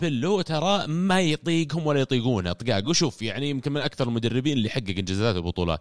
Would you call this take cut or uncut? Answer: uncut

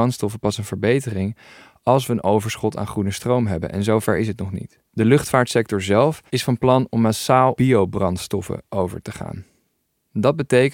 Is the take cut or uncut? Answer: cut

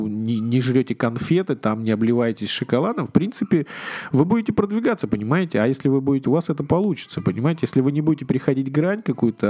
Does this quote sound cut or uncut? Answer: cut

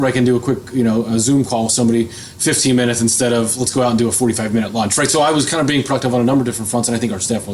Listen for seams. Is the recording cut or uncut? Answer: uncut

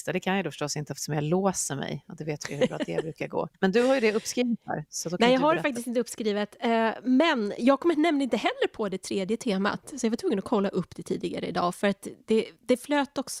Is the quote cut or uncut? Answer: cut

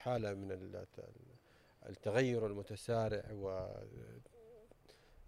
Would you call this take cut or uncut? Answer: uncut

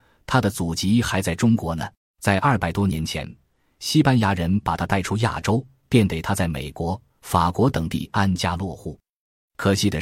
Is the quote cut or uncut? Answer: cut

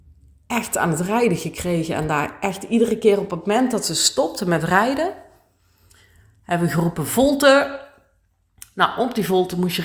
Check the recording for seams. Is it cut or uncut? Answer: uncut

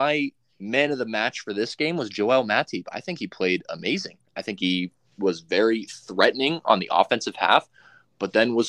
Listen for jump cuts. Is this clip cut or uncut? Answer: uncut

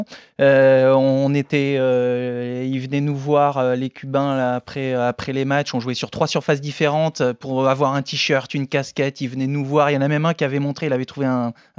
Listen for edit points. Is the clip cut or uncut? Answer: uncut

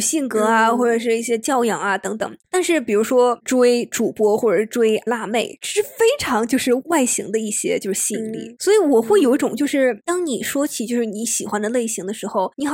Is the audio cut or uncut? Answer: cut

